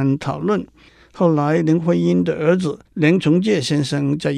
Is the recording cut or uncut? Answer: cut